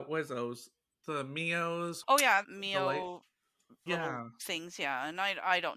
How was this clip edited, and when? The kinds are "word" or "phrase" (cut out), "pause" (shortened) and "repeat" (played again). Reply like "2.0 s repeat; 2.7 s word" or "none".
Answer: 2.0 s word; 2.4 s word; 3.9 s word

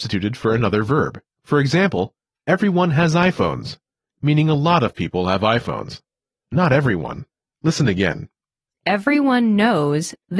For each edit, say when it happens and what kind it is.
none

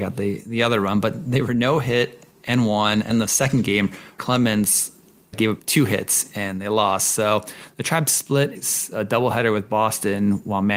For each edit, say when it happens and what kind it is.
3.1 s word; 4.2 s word; 5.3 s word; 8.5 s word

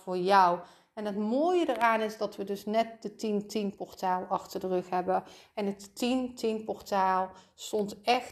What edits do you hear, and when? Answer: none

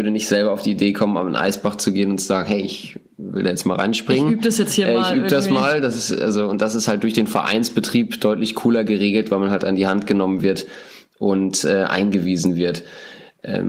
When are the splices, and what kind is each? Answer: none

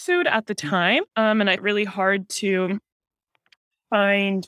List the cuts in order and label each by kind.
1.1 s pause; 1.6 s word

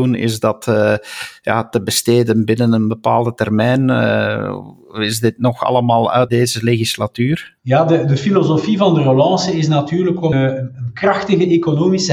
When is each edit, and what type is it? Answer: 6.3 s phrase; 7.6 s pause; 10.3 s word

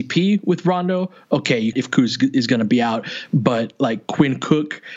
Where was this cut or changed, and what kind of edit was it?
1.7 s phrase

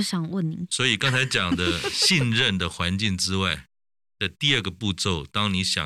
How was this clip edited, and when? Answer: none

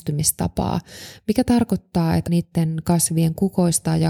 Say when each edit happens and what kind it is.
2.3 s word

